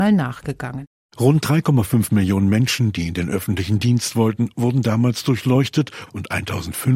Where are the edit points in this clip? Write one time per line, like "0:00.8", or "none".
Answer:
none